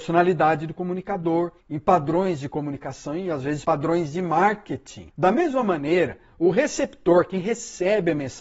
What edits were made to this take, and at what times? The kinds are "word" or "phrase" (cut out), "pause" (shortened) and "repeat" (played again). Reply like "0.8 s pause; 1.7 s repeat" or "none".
1.6 s pause